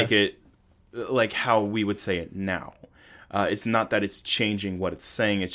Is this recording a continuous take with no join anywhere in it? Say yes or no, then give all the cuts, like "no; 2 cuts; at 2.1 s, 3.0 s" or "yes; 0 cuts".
yes; 0 cuts